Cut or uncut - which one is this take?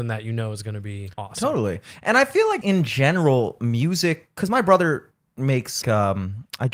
cut